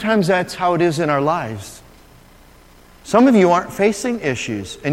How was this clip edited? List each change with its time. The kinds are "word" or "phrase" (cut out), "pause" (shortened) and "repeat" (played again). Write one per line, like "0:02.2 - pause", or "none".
none

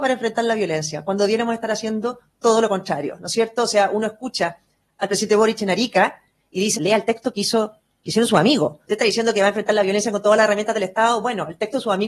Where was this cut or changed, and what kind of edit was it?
0:06.7 - word
0:08.9 - word

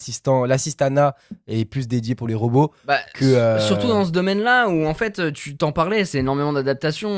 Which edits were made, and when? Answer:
none

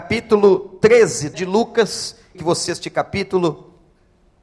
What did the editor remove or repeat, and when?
0:01.3 - word
0:02.3 - word
0:02.7 - word

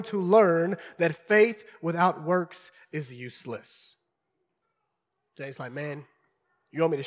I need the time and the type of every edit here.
0:04.6 - pause

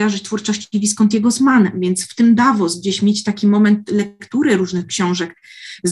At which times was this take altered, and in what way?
none

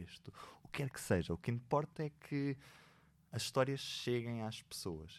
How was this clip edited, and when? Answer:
none

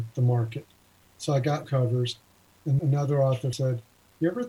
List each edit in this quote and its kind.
0:01.6 - word
0:02.8 - word
0:03.5 - word

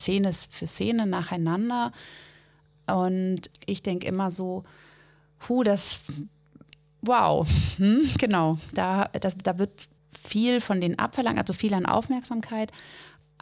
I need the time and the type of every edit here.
0:10.0 - pause

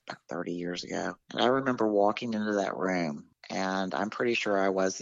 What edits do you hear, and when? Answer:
none

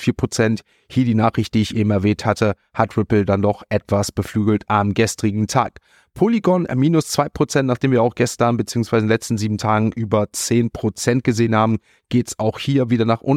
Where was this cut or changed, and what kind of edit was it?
none

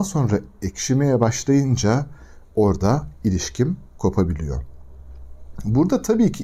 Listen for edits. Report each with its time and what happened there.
none

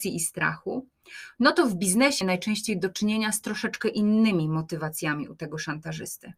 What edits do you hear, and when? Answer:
0:02.2 - word

